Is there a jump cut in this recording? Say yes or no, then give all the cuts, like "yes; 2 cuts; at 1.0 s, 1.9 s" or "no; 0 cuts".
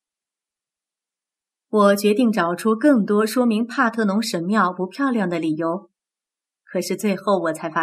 no; 0 cuts